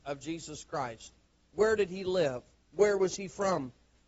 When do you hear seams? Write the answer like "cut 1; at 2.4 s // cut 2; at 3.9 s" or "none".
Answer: none